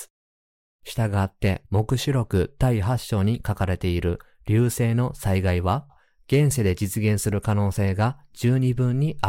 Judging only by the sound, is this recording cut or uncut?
uncut